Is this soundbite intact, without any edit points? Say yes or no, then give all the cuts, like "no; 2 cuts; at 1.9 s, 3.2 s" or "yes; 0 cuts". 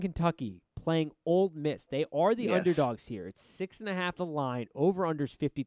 no; 1 cut; at 4.1 s